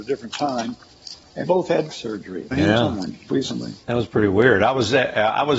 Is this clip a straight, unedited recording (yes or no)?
no